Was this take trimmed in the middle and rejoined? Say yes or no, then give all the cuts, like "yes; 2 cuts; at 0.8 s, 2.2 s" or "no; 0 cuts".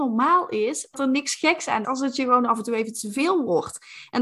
yes; 2 cuts; at 0.9 s, 1.8 s